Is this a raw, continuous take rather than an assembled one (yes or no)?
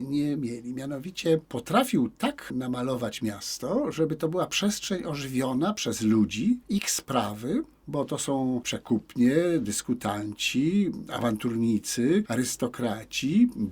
yes